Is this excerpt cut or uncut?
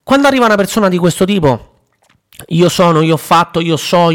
uncut